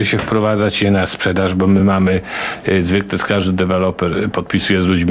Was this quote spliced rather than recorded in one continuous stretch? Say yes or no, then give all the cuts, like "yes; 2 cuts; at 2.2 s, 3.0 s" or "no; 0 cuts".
no; 0 cuts